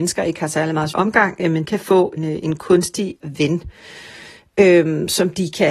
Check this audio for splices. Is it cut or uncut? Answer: cut